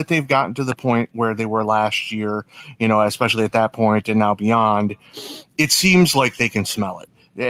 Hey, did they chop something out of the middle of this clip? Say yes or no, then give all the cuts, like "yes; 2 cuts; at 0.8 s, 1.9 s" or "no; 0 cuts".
no; 0 cuts